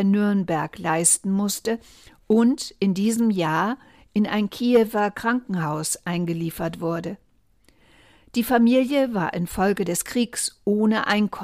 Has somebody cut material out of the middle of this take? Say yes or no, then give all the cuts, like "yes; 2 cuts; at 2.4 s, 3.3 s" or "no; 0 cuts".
no; 0 cuts